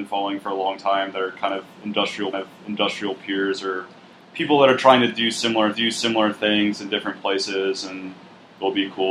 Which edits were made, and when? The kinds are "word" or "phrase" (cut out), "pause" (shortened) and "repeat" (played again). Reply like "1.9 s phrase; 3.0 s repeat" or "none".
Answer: 2.3 s repeat; 5.7 s repeat

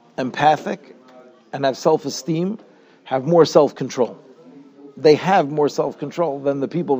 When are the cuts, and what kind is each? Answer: none

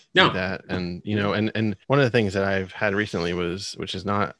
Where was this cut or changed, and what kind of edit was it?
1.8 s pause

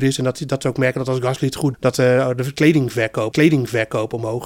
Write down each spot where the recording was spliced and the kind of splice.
1.7 s word; 3.3 s repeat

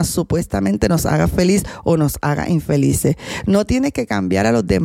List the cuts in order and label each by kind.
none

